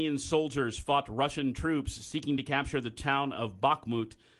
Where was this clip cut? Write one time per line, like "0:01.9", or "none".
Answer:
none